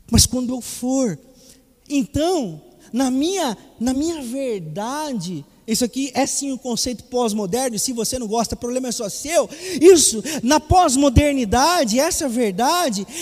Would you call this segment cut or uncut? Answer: uncut